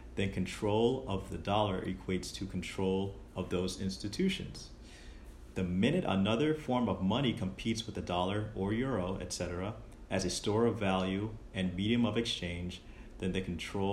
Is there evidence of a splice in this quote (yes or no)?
no